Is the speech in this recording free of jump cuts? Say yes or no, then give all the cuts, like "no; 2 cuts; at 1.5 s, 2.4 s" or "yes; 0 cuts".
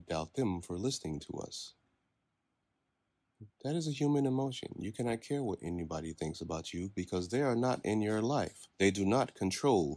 no; 1 cut; at 8.7 s